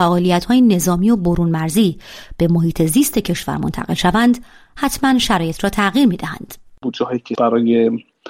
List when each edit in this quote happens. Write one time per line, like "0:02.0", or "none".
none